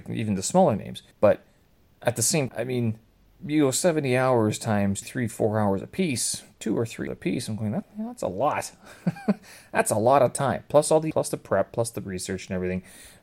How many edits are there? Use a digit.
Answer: 6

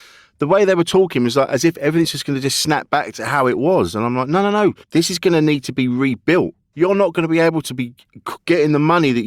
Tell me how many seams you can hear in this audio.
1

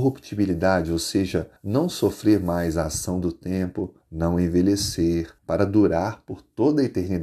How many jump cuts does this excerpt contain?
3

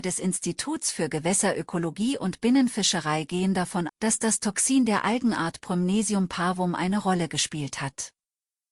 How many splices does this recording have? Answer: 1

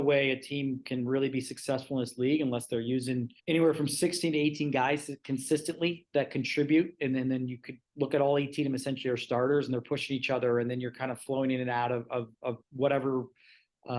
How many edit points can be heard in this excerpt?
2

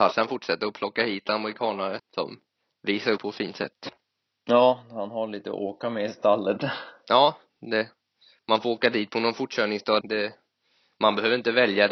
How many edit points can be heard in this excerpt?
3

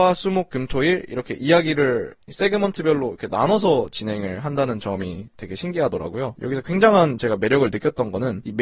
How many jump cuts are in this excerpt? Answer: 1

